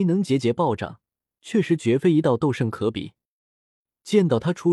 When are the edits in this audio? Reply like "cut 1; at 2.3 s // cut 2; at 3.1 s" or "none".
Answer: none